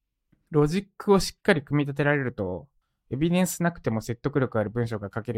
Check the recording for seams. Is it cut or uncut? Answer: cut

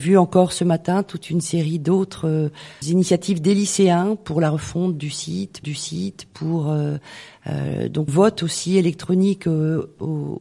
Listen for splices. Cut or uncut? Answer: cut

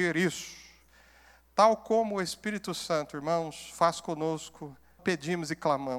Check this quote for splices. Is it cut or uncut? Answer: cut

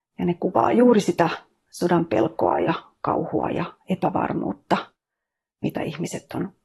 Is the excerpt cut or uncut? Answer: uncut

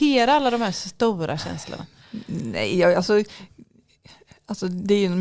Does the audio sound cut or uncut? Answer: uncut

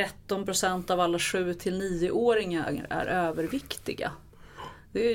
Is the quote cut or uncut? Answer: uncut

